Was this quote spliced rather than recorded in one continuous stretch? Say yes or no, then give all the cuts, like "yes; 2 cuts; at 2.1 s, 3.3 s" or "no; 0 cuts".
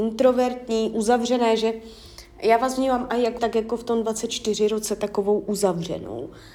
yes; 1 cut; at 3.4 s